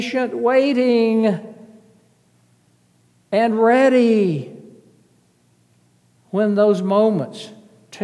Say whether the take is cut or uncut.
uncut